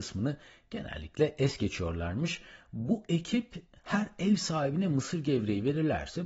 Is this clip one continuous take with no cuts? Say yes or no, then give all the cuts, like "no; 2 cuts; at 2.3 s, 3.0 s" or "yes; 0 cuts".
yes; 0 cuts